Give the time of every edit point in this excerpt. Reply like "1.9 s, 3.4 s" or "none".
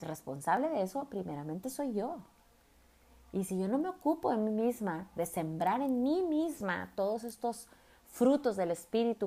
none